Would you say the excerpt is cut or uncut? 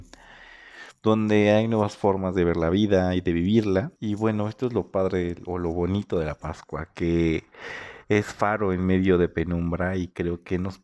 cut